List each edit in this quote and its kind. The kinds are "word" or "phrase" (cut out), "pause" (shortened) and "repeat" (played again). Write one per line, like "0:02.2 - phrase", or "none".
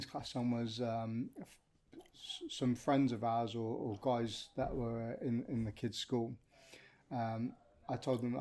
none